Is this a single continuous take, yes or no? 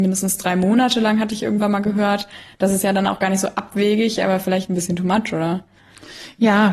yes